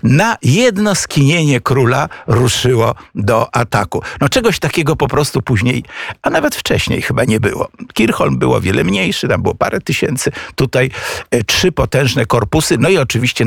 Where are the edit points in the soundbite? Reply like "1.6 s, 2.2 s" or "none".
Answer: none